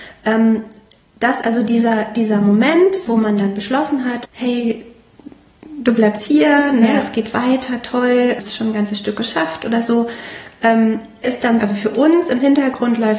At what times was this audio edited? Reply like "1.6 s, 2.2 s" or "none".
1.4 s, 3.1 s, 4.2 s, 6.2 s, 8.4 s, 11.2 s, 11.6 s